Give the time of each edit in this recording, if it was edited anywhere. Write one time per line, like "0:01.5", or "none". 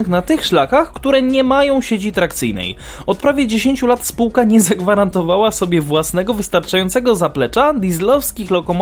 none